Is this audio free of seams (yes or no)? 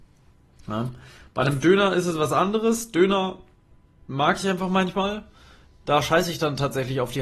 yes